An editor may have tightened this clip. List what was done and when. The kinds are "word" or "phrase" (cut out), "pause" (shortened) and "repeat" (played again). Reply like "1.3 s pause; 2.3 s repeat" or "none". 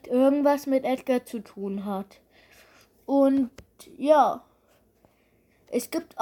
none